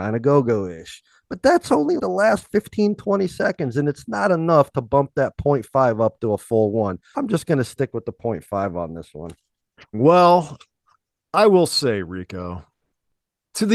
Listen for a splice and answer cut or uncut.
cut